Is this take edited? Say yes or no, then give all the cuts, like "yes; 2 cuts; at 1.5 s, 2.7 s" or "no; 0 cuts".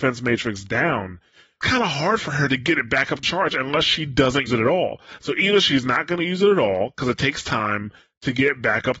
yes; 3 cuts; at 1.6 s, 3.2 s, 4.5 s